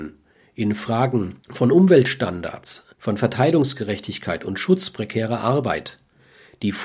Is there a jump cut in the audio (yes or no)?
yes